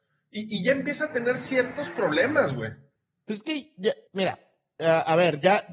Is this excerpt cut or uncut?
cut